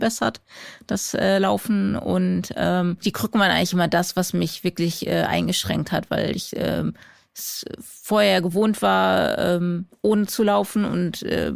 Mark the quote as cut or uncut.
cut